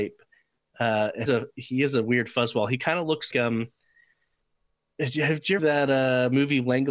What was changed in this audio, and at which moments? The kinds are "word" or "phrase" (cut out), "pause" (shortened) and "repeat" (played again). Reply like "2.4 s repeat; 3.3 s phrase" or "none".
1.3 s word; 3.3 s word; 5.6 s word